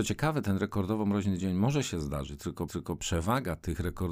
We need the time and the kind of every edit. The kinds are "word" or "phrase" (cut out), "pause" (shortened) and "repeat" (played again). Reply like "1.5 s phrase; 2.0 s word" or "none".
2.7 s repeat